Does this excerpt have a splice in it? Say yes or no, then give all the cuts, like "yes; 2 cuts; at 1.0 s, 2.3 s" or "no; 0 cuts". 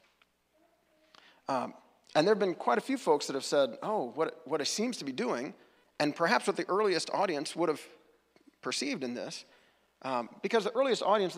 no; 0 cuts